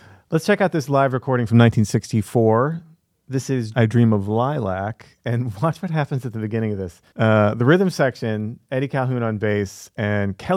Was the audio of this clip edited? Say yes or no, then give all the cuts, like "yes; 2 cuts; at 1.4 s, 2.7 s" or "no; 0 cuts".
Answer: yes; 2 cuts; at 3.7 s, 7.1 s